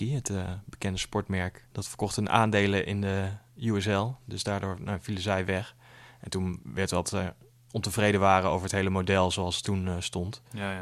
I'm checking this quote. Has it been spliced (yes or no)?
yes